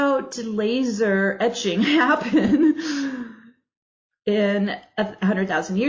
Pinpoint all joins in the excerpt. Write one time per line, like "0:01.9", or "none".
none